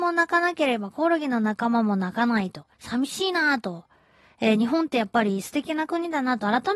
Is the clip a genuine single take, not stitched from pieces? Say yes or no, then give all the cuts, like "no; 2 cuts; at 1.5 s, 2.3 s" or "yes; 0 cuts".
no; 1 cut; at 2.7 s